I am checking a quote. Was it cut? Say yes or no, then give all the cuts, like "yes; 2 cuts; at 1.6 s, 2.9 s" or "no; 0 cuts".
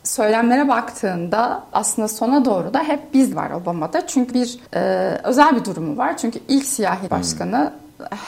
yes; 5 cuts; at 1.7 s, 3.3 s, 4.3 s, 4.7 s, 7.1 s